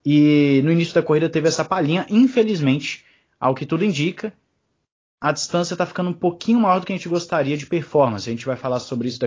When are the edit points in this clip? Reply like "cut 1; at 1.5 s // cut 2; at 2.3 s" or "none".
none

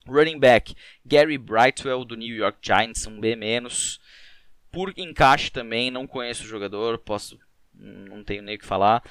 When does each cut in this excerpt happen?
none

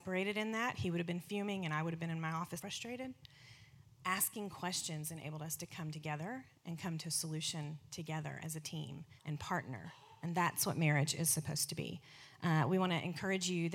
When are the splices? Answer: cut 1; at 2.6 s // cut 2; at 9.2 s

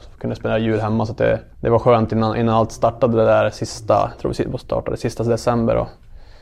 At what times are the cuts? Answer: cut 1; at 1.5 s

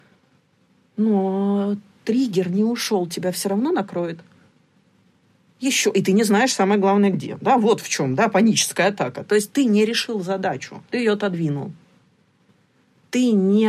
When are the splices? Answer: cut 1; at 10.9 s

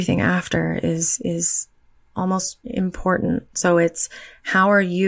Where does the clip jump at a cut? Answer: cut 1; at 2.6 s

